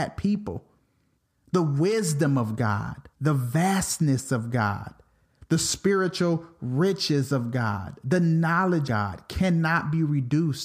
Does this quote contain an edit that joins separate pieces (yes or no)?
yes